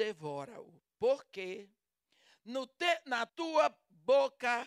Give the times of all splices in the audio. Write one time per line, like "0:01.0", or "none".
0:03.3

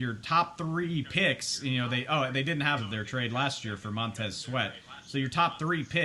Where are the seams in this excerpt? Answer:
0:02.8

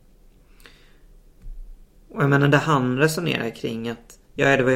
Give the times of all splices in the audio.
0:01.9

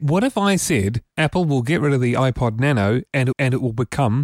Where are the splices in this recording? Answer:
0:01.1
0:03.3

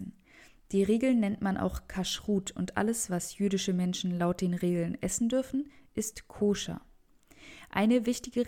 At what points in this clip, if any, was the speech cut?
none

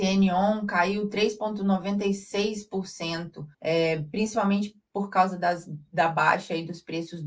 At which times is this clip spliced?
0:03.5
0:04.9

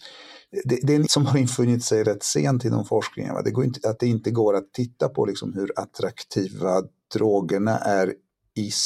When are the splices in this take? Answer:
0:01.1
0:04.0

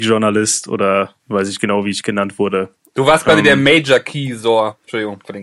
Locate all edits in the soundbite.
0:01.2

